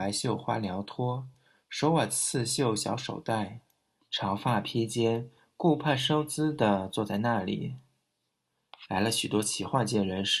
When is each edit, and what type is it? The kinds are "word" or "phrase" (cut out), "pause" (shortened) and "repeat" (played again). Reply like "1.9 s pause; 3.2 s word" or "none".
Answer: none